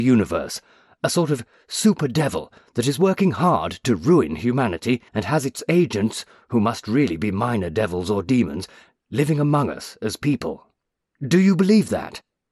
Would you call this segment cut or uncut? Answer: cut